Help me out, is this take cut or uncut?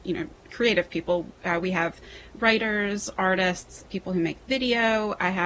cut